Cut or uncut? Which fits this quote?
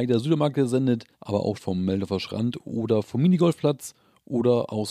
cut